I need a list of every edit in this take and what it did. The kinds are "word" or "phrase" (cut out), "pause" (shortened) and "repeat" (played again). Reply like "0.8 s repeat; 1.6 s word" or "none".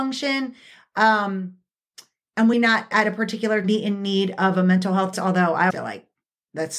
2.5 s word; 2.9 s word; 3.6 s word; 5.1 s word; 5.7 s word